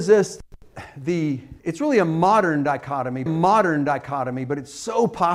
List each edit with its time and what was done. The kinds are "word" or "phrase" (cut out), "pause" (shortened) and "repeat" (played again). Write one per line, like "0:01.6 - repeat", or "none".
0:01.6 - pause
0:03.3 - repeat